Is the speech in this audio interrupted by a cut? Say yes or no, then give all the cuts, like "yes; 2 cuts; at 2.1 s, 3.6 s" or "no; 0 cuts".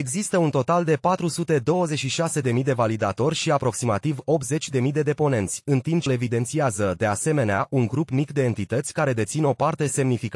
yes; 1 cut; at 6.1 s